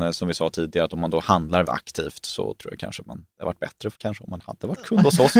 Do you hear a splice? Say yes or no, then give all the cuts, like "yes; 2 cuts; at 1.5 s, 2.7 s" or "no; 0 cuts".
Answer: yes; 3 cuts; at 1.6 s, 3.3 s, 3.9 s